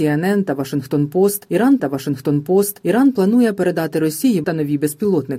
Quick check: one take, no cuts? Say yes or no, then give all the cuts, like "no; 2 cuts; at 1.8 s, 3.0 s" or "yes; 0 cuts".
no; 2 cuts; at 1.8 s, 4.4 s